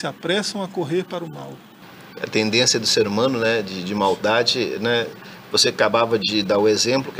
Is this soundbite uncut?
yes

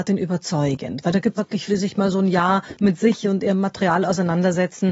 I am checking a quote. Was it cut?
yes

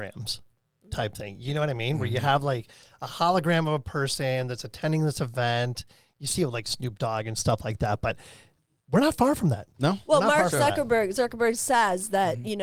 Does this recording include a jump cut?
no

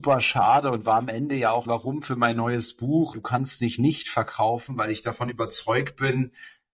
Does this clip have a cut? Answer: yes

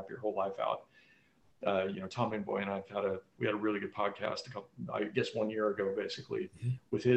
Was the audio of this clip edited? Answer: no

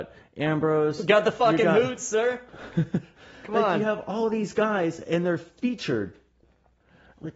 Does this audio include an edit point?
yes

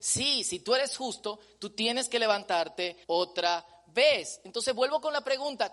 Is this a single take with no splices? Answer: no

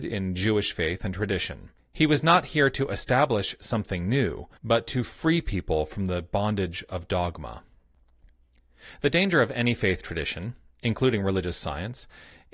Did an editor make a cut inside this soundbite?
yes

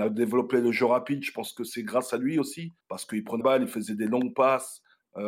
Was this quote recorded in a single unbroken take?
no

